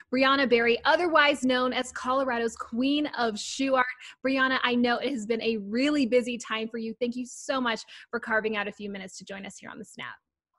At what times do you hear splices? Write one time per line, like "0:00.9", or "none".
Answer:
none